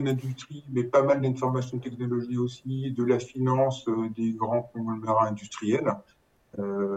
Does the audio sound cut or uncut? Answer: uncut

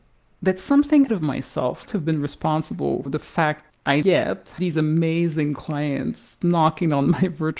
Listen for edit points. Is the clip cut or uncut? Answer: cut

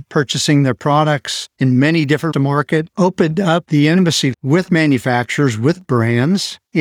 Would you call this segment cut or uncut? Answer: cut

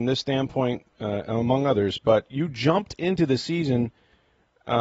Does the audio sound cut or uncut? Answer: uncut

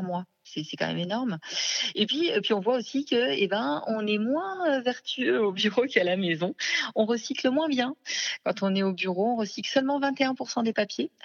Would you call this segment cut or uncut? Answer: uncut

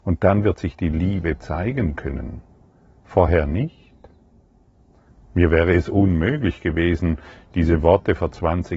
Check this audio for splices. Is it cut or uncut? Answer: uncut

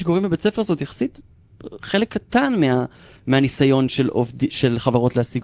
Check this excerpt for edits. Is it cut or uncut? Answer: uncut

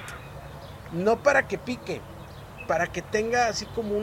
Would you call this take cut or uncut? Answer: uncut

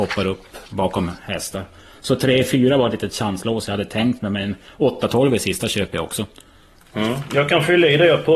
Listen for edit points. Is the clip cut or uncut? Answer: uncut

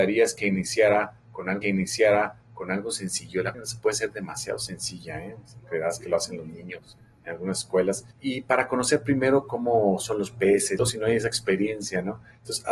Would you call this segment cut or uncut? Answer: cut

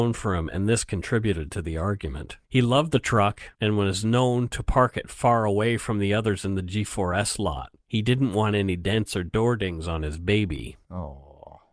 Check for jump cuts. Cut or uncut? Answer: cut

